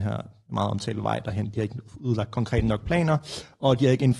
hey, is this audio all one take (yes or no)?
yes